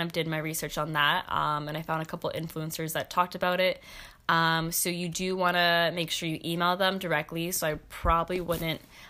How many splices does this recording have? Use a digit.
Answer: 0